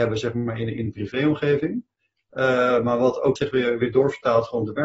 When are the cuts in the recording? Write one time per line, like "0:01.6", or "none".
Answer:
0:03.4